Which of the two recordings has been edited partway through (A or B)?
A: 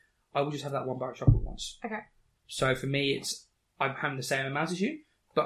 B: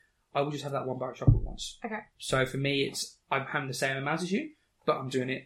B